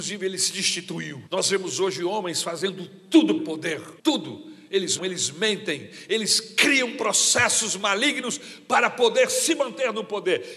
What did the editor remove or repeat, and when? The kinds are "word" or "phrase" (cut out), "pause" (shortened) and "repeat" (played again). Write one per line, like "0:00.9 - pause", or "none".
0:01.3 - pause
0:03.4 - word
0:04.0 - pause
0:05.0 - word